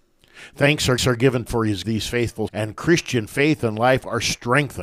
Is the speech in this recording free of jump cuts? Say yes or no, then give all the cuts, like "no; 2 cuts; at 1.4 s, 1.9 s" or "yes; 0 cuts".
no; 4 cuts; at 1.0 s, 1.5 s, 1.8 s, 2.5 s